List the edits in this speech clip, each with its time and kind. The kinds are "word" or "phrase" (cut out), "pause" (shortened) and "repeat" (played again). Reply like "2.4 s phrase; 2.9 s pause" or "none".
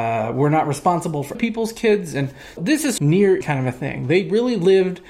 1.3 s word; 2.6 s word; 3.0 s phrase; 3.4 s word